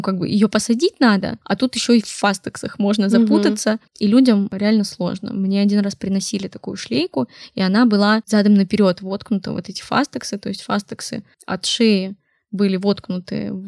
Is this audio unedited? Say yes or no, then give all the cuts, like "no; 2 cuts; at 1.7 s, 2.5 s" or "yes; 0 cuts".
no; 3 cuts; at 1.4 s, 3.9 s, 11.3 s